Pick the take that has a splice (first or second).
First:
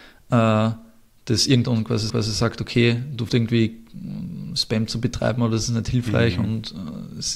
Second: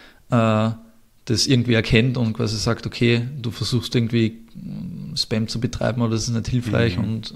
first